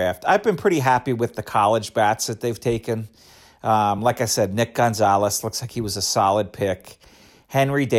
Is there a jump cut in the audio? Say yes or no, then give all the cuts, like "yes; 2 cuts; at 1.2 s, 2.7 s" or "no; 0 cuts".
no; 0 cuts